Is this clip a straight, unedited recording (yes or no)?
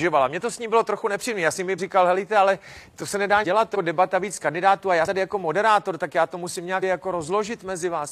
no